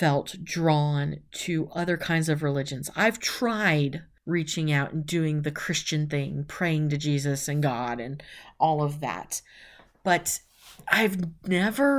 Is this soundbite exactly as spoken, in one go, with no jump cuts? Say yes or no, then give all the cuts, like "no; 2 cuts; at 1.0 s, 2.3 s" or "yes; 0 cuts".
yes; 0 cuts